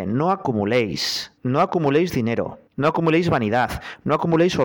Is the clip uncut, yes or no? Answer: no